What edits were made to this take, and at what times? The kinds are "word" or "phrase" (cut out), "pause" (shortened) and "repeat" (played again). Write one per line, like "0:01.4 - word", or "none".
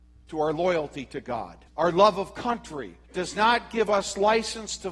0:01.7 - pause
0:03.0 - pause